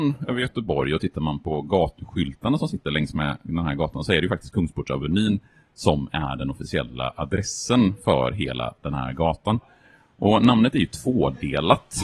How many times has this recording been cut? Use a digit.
0